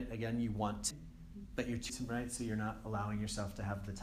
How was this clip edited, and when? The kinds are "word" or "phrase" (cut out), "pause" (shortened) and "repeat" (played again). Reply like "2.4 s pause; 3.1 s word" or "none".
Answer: 0.9 s word; 1.9 s word